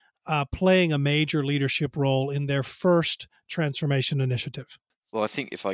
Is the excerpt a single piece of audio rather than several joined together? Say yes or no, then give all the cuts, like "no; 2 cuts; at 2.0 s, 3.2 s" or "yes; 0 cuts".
yes; 0 cuts